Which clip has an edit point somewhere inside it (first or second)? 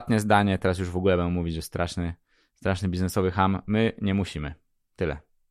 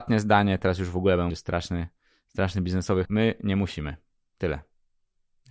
second